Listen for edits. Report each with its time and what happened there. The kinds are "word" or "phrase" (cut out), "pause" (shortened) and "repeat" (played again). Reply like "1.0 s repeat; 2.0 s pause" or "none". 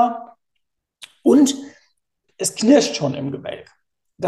2.3 s word